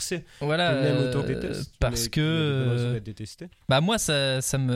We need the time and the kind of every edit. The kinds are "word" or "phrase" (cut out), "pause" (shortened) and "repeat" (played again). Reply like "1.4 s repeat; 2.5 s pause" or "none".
1.2 s word